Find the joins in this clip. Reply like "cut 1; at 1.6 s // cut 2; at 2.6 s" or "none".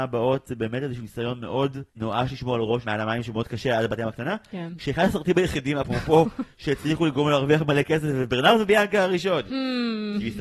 cut 1; at 1.9 s